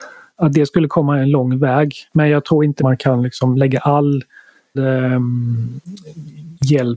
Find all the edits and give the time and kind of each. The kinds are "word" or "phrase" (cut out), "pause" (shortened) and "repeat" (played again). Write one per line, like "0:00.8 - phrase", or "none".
0:02.1 - pause
0:02.8 - phrase
0:04.8 - word